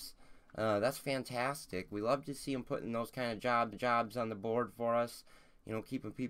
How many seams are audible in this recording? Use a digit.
1